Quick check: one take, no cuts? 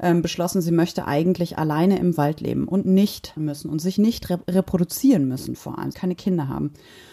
no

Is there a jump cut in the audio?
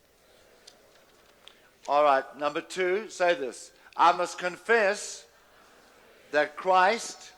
no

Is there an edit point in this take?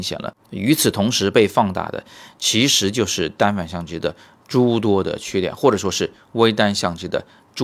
no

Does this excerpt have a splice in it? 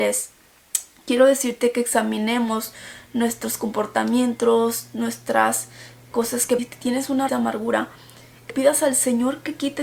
yes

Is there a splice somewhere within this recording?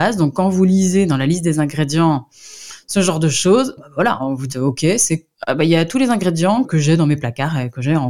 yes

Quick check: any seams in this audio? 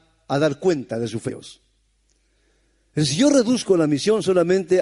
yes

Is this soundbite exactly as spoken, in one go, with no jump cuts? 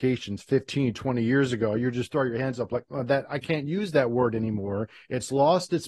yes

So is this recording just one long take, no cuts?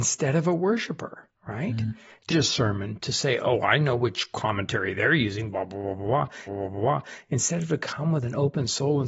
no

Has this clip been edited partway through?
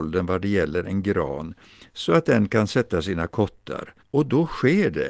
yes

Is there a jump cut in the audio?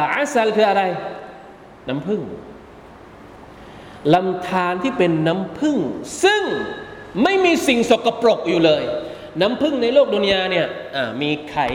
no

